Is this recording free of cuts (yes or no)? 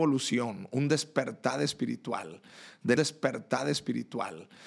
no